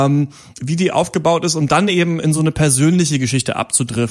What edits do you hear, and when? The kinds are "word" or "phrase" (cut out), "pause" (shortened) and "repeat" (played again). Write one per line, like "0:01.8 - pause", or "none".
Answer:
none

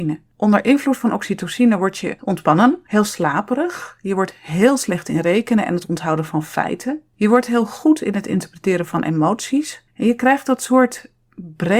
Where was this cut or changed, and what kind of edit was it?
0:09.9 - pause

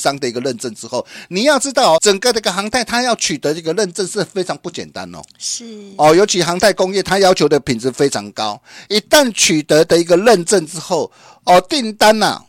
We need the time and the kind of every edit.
0:02.0 - word

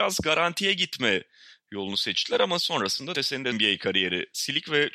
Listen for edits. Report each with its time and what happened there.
0:03.1 - word
0:03.5 - phrase

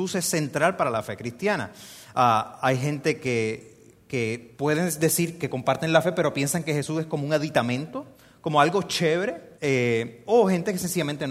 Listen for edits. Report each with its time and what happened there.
0:04.5 - pause
0:09.6 - pause

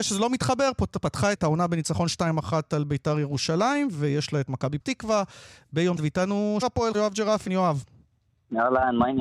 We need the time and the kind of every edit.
0:01.3 - word
0:04.8 - word
0:06.0 - word
0:06.6 - word
0:06.9 - word
0:07.5 - word

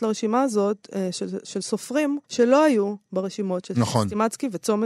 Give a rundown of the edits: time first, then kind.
0:02.2 - pause

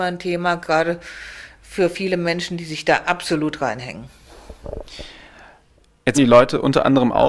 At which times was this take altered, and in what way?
0:06.1 - word

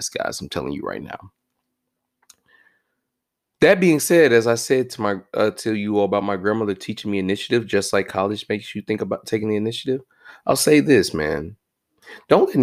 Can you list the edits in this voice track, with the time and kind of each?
none

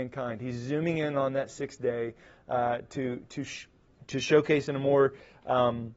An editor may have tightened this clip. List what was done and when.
none

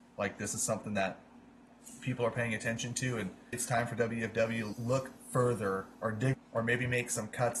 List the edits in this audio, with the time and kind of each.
0:03.5 - word
0:04.7 - word
0:05.9 - pause
0:06.3 - phrase

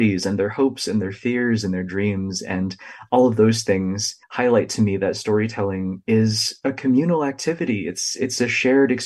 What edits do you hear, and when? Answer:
0:04.2 - pause

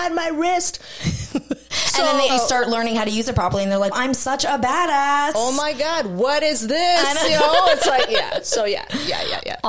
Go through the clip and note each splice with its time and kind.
0:02.3 - word
0:03.9 - word

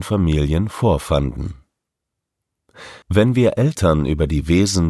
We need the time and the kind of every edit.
0:03.0 - pause

